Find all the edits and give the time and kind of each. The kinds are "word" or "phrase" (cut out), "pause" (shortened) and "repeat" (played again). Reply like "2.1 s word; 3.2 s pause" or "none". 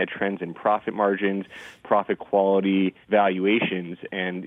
3.0 s pause